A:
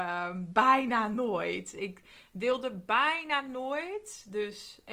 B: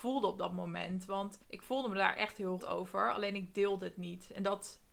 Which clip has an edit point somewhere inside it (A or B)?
B